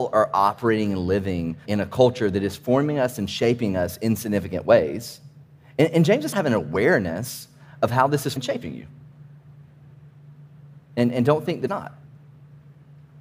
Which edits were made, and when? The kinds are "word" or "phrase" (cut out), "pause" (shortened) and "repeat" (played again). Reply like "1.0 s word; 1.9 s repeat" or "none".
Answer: 1.7 s word; 5.6 s pause; 6.3 s phrase; 8.4 s word; 11.7 s word